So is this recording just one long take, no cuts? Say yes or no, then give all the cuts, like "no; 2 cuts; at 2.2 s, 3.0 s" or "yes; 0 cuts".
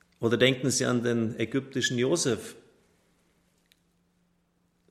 yes; 0 cuts